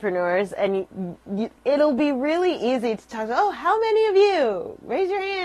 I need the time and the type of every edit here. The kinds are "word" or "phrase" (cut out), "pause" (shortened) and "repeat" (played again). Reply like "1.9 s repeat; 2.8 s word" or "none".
1.6 s word